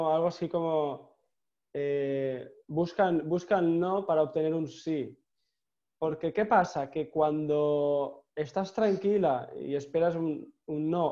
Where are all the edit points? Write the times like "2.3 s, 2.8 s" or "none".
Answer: 8.3 s